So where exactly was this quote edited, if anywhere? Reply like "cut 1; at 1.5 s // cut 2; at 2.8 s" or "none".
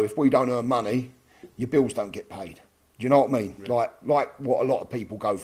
none